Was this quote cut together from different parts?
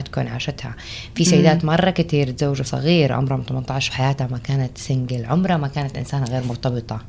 yes; 2 cuts; at 2.7 s, 3.9 s

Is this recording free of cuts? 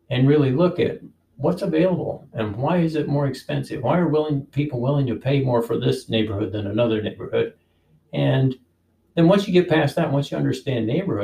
yes; 0 cuts

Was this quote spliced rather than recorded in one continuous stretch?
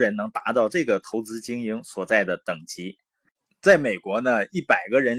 no; 0 cuts

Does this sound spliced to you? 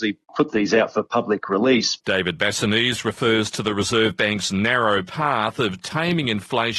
no; 0 cuts

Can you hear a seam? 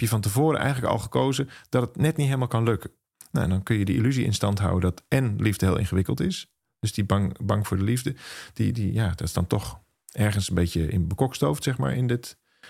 no; 0 cuts

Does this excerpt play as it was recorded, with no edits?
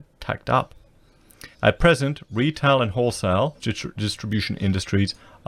no; 2 cuts; at 1.5 s, 3.6 s

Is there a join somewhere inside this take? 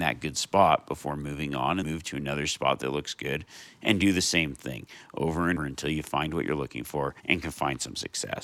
yes; 3 cuts; at 1.8 s, 5.6 s, 7.2 s

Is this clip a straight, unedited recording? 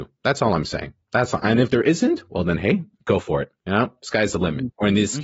no; 3 cuts; at 1.0 s, 2.9 s, 3.6 s

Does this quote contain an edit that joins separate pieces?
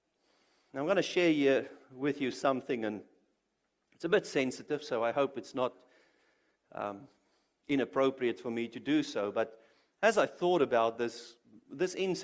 no; 0 cuts

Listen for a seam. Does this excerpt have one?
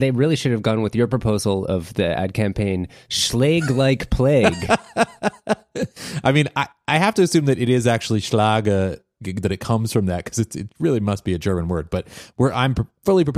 no; 0 cuts

